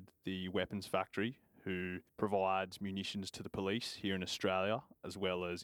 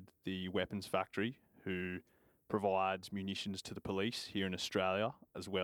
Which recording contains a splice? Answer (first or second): first